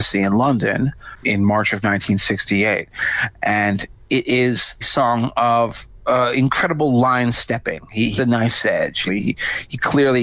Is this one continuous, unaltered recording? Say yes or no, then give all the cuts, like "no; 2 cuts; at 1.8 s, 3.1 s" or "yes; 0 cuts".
no; 4 cuts; at 1.2 s, 4.8 s, 8.2 s, 9.1 s